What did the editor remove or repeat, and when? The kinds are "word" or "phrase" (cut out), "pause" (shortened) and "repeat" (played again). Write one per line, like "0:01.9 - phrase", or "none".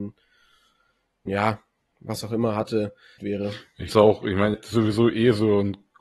0:01.3 - word
0:03.2 - phrase
0:03.9 - word
0:04.5 - word